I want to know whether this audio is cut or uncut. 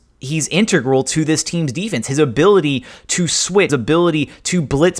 cut